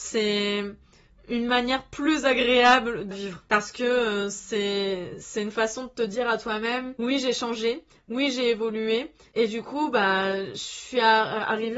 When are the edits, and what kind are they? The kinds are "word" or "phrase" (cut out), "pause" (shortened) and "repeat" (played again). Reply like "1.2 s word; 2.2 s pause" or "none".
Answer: 3.1 s phrase